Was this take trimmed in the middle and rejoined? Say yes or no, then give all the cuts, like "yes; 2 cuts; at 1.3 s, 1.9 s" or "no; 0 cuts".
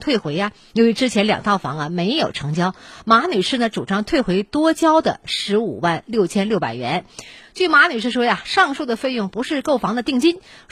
no; 0 cuts